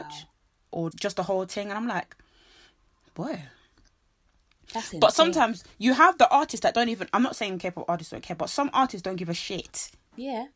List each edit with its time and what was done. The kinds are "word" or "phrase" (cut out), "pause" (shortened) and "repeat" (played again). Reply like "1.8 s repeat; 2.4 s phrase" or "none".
0.9 s word